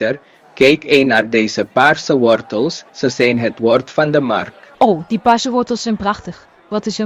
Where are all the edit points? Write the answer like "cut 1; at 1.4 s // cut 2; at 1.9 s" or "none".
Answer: cut 1; at 2.9 s // cut 2; at 4.7 s